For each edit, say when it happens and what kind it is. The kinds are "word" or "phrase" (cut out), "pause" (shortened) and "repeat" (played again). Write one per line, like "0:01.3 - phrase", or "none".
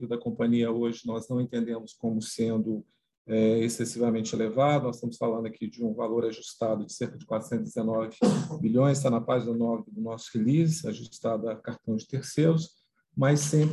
none